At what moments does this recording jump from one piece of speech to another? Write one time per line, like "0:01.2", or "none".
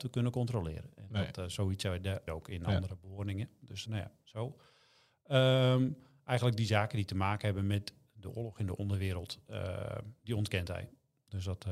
0:02.3
0:03.9